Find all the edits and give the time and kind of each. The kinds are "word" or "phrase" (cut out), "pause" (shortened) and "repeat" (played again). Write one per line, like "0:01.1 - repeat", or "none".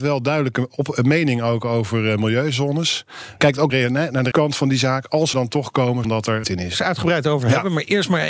0:03.7 - word
0:04.3 - word
0:05.3 - phrase
0:06.0 - phrase
0:06.4 - phrase
0:06.7 - phrase